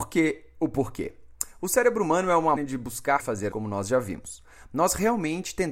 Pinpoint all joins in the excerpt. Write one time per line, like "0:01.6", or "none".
0:02.6
0:03.2
0:03.5